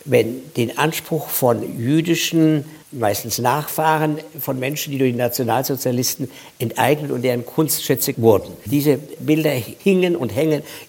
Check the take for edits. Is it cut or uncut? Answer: cut